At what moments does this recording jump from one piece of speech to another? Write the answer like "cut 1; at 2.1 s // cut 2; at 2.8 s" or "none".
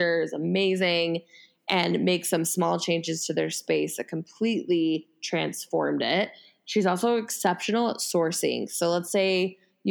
none